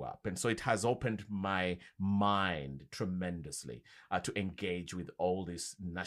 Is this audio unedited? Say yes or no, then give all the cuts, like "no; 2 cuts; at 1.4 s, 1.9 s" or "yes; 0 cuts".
yes; 0 cuts